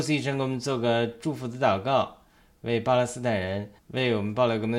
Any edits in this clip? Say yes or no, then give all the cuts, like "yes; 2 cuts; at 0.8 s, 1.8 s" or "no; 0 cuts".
yes; 1 cut; at 3.8 s